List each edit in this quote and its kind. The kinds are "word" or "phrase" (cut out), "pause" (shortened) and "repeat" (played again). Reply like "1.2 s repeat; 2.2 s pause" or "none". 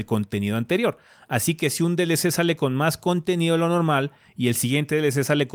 none